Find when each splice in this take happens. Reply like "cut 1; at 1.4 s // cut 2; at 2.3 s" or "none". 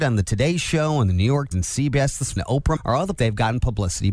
cut 1; at 1.5 s // cut 2; at 2.4 s // cut 3; at 2.8 s // cut 4; at 3.2 s